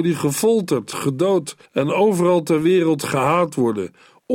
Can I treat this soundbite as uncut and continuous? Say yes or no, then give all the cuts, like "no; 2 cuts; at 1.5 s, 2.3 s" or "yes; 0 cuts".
no; 1 cut; at 1.7 s